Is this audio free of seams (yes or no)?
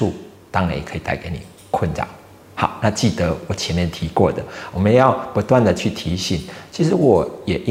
yes